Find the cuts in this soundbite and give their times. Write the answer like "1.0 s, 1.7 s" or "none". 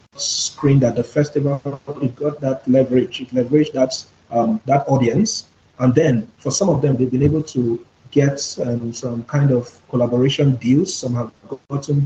none